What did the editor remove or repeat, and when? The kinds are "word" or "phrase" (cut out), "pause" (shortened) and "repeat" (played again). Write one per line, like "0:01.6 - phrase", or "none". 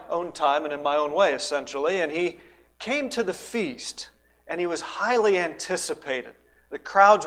none